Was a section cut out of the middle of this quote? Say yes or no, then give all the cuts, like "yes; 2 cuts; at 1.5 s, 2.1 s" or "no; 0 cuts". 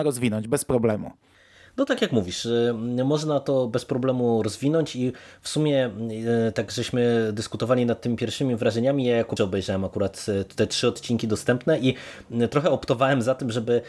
yes; 1 cut; at 9.4 s